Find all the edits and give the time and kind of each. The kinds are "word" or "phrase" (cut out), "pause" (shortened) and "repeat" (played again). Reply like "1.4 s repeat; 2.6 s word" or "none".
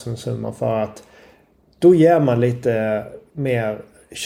none